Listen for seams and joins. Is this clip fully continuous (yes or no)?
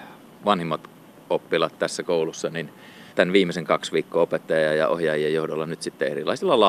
no